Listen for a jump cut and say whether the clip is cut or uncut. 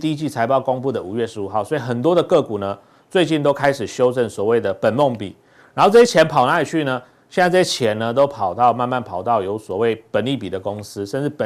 uncut